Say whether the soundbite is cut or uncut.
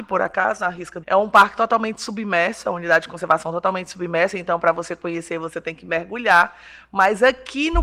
cut